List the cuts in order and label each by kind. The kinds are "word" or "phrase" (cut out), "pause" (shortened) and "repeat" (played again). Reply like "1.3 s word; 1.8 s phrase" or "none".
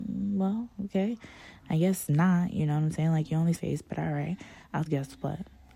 3.6 s phrase; 4.9 s phrase